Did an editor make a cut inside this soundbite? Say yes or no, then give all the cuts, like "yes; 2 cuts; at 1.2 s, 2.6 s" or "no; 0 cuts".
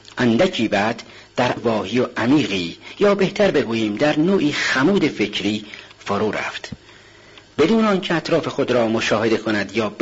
yes; 1 cut; at 1.6 s